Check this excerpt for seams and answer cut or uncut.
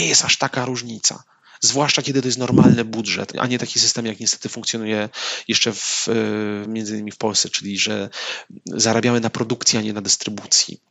uncut